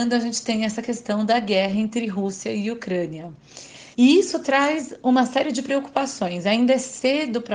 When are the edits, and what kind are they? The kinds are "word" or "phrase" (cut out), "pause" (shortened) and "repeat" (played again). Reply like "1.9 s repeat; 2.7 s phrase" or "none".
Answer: 3.9 s pause